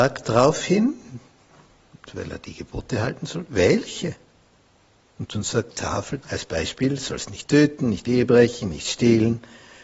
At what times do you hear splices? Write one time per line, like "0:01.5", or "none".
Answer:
0:05.7
0:06.2

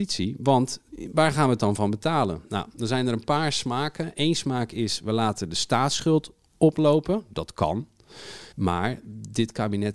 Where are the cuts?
0:08.5

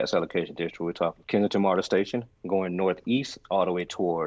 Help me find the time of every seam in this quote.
0:01.2
0:02.4

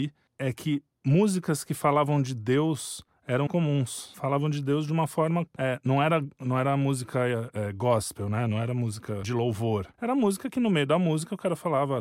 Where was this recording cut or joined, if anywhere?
0:03.5

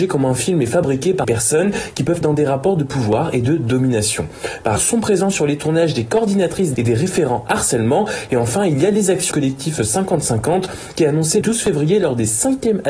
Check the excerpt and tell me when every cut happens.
0:01.2
0:02.2
0:04.8
0:06.7
0:09.3
0:11.4

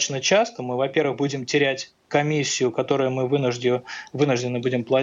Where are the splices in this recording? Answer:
none

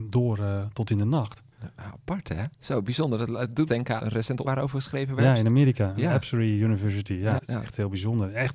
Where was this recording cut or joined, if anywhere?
0:01.5
0:02.5
0:03.7
0:04.0
0:04.4
0:07.4

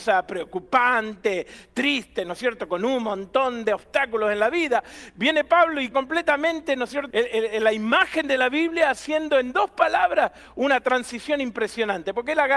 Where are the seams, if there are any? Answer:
0:05.9
0:07.1

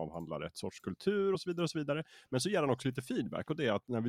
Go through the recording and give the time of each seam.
none

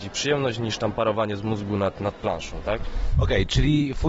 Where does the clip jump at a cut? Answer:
none

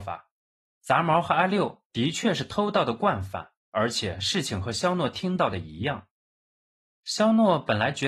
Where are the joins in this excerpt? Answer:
0:03.6

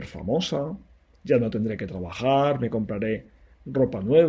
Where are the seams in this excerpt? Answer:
none

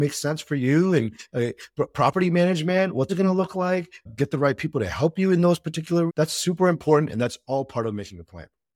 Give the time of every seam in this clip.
0:01.3
0:03.1
0:04.1
0:06.1

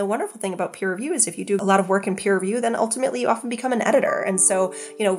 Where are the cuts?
none

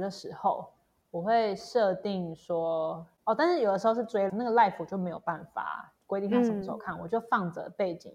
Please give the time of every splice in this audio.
0:04.3
0:06.0

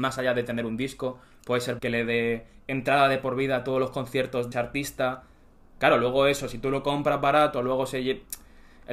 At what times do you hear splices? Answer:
0:01.8
0:04.5

